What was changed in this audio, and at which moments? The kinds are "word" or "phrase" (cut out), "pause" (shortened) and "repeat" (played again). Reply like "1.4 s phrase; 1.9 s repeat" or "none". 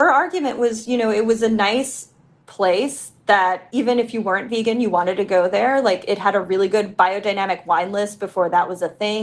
none

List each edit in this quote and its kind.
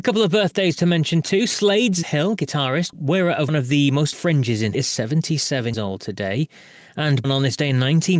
2.0 s word; 2.9 s word; 3.5 s word; 4.1 s word; 4.7 s word; 5.7 s word; 7.2 s word

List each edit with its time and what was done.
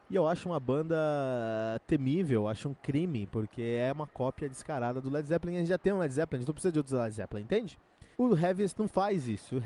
8.1 s pause

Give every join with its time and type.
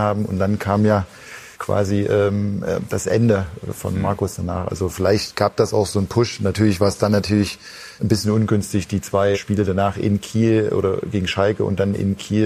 1.5 s pause; 8.0 s word; 9.3 s word

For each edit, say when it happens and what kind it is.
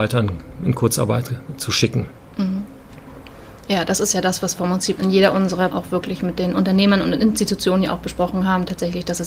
4.6 s word; 5.0 s word; 5.7 s word

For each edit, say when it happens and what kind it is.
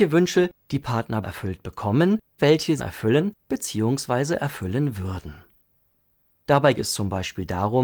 1.2 s word; 2.4 s word; 2.8 s phrase; 6.8 s word

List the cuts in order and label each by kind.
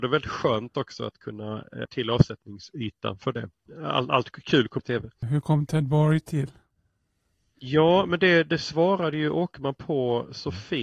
1.8 s phrase; 4.8 s phrase

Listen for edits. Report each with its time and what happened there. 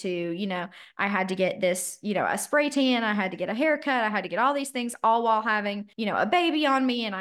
5.9 s pause

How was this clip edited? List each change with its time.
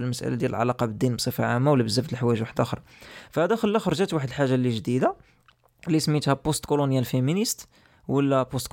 none

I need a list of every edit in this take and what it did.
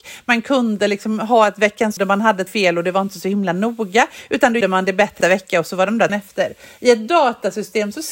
2.0 s word; 2.5 s word; 4.6 s word; 5.2 s word; 6.1 s phrase

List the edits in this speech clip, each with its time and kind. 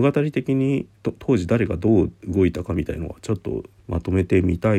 0.9 s pause; 3.8 s pause

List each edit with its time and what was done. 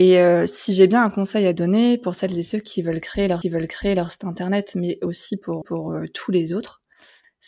3.4 s repeat; 5.6 s repeat

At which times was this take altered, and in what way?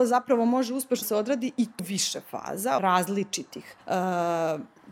1.0 s word; 1.8 s word; 2.8 s phrase; 3.8 s pause

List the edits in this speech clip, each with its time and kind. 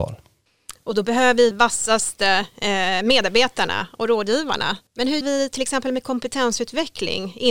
1.5 s phrase; 4.9 s pause; 5.2 s word

